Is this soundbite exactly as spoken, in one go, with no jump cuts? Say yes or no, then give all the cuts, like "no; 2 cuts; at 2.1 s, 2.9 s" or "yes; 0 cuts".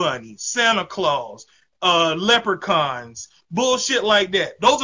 yes; 0 cuts